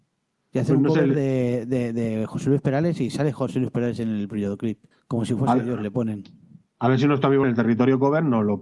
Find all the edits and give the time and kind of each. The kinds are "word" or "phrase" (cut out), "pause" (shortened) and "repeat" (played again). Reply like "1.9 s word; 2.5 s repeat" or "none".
4.9 s pause; 7.4 s phrase